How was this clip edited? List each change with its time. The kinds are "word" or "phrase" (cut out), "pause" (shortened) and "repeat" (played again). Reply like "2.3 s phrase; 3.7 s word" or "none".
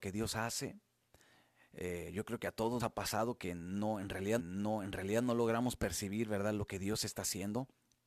2.8 s word; 4.4 s repeat